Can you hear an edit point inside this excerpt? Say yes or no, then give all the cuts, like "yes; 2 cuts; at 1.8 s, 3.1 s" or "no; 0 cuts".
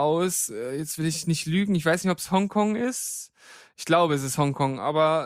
no; 0 cuts